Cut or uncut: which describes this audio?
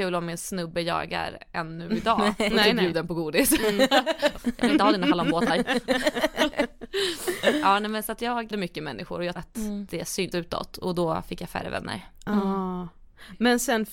cut